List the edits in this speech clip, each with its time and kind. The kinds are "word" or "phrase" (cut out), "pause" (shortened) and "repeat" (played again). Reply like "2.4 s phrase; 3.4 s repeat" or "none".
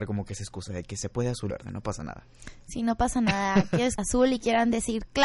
1.5 s phrase; 4.0 s phrase